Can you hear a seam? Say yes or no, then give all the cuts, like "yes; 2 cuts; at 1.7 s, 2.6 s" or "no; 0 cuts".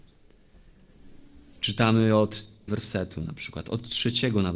yes; 1 cut; at 2.7 s